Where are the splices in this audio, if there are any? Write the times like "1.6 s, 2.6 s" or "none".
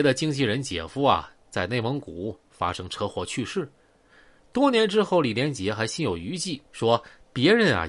6.7 s